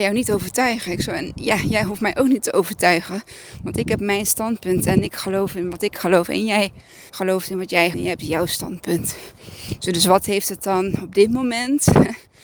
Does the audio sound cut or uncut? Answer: cut